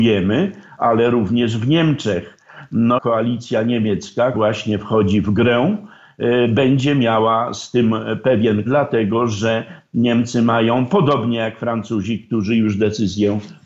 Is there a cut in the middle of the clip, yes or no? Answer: yes